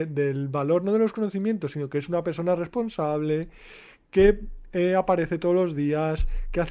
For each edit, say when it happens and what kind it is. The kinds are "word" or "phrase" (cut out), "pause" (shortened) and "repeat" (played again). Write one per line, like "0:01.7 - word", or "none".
none